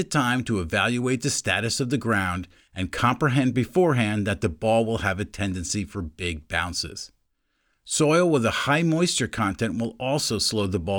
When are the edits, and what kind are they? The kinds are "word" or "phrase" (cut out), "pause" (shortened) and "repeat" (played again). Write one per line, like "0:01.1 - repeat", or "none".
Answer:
none